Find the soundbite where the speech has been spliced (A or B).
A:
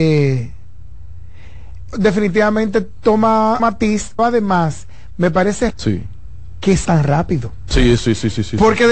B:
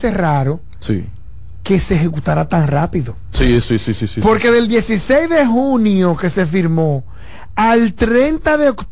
A